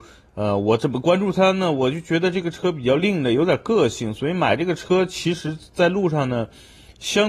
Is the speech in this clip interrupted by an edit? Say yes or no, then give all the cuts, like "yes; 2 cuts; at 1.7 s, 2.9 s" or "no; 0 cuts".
no; 0 cuts